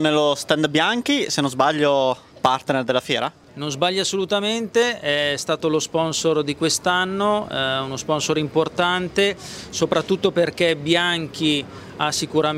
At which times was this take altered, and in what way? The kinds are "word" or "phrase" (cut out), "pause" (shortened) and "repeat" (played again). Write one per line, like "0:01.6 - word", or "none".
none